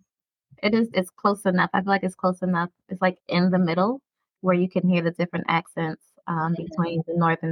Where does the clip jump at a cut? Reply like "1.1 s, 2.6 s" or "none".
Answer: 0.9 s